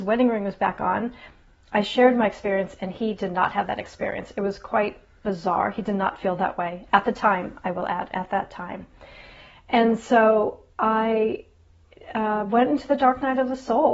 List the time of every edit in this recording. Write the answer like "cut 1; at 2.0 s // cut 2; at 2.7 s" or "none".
cut 1; at 5.2 s